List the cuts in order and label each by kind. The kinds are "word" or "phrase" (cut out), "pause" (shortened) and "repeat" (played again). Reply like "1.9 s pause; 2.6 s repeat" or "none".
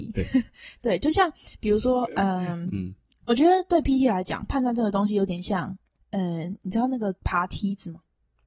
none